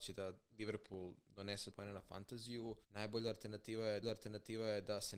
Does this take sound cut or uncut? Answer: cut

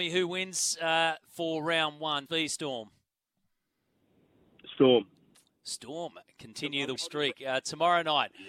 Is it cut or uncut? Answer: cut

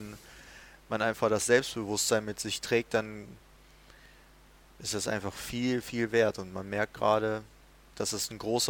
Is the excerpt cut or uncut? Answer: uncut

